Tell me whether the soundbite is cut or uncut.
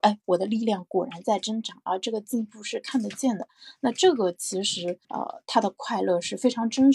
cut